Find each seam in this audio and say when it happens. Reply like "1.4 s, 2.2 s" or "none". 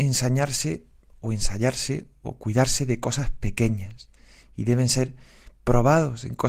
none